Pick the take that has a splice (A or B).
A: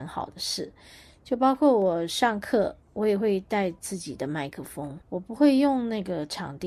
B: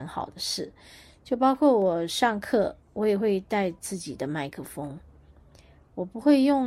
A